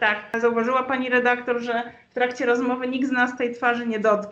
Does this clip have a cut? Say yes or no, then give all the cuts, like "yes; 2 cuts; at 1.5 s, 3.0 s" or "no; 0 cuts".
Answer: no; 0 cuts